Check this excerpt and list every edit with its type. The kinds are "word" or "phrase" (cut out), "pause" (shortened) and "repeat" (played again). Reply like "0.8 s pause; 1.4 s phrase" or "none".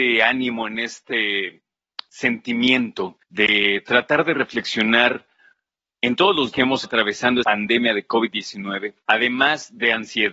3.2 s pause; 5.8 s pause; 6.5 s word; 6.8 s word; 7.4 s word; 9.0 s pause